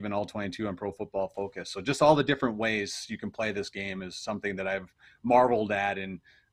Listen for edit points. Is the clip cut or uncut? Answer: uncut